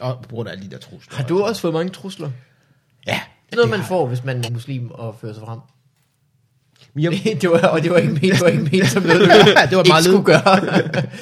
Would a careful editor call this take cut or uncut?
cut